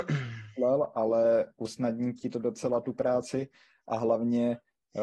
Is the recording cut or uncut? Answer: uncut